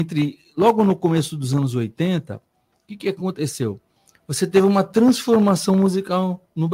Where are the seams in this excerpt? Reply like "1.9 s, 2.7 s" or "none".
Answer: none